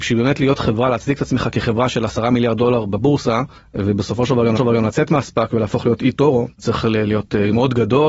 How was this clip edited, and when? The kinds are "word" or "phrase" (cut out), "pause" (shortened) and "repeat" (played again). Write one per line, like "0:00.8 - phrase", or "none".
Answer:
0:03.6 - pause
0:04.6 - repeat
0:06.5 - pause